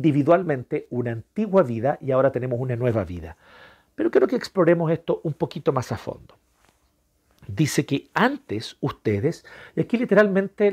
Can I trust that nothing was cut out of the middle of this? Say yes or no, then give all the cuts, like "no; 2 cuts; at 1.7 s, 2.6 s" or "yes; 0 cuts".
yes; 0 cuts